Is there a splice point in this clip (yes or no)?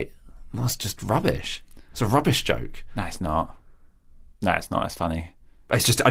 no